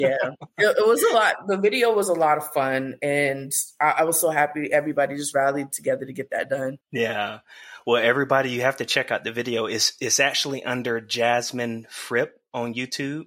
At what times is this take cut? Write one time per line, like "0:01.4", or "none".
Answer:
0:06.8